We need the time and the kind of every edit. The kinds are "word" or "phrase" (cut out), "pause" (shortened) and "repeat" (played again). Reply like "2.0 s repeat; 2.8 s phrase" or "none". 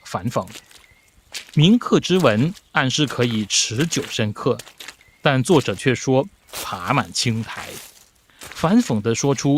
none